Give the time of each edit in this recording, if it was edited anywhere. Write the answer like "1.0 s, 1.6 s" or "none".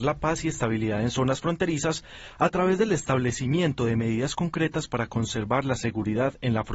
none